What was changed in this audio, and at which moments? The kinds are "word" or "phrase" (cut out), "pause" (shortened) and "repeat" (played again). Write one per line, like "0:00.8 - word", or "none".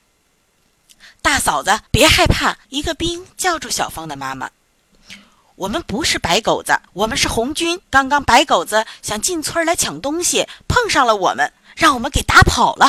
0:01.9 - pause
0:02.6 - pause
0:04.7 - pause
0:06.9 - pause
0:07.8 - pause